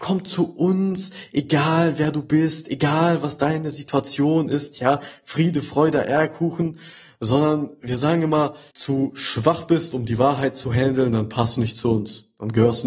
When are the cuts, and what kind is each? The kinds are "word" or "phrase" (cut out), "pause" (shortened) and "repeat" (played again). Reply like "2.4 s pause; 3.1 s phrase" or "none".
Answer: 8.7 s phrase